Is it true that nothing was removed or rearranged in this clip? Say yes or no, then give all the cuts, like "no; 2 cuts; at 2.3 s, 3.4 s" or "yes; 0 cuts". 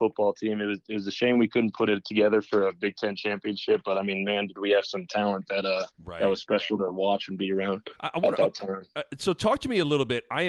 no; 2 cuts; at 5.9 s, 8.0 s